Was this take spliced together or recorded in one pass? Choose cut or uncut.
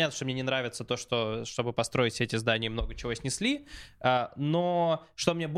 uncut